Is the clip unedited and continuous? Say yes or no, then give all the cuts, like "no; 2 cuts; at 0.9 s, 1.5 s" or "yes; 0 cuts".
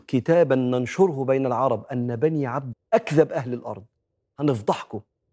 no; 1 cut; at 2.7 s